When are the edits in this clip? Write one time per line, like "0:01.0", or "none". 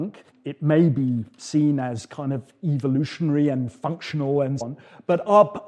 0:04.6